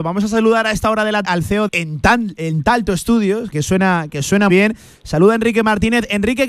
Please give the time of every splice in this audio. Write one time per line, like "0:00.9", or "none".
0:01.2
0:01.7
0:03.5
0:04.5